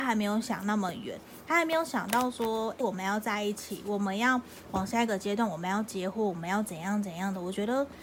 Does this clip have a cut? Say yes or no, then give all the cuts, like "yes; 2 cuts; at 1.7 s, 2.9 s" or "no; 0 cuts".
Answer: yes; 1 cut; at 2.8 s